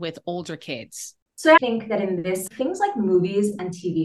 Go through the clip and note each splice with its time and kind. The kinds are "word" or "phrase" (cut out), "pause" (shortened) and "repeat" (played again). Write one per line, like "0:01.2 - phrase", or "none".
0:01.6 - word
0:02.5 - word